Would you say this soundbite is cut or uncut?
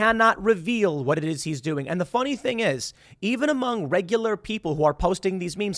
uncut